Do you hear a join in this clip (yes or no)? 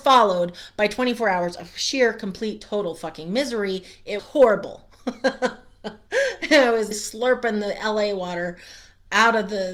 yes